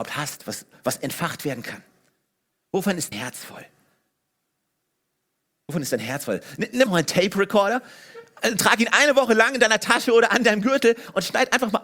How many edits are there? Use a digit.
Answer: 2